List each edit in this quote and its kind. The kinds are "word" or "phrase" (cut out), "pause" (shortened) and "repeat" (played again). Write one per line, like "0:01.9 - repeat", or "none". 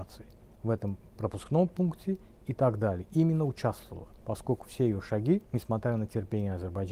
0:04.2 - pause
0:05.5 - pause

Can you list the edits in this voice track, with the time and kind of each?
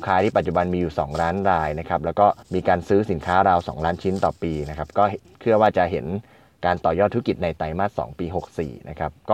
0:02.4 - pause

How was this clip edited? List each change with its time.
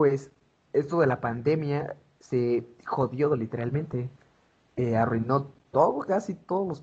none

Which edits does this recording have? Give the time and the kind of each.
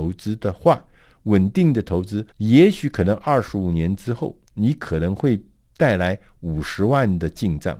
0:02.3 - pause
0:04.4 - pause

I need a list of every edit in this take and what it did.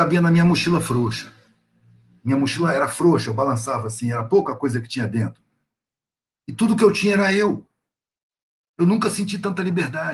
none

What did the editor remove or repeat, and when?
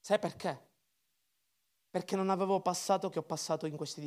0:03.1 - word

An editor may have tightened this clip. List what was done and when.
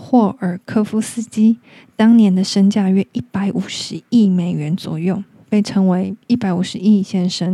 none

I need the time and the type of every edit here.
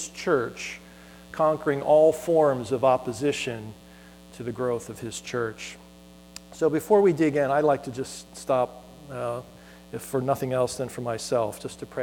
none

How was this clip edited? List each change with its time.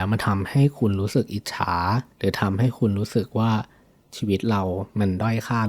0:02.1 - pause

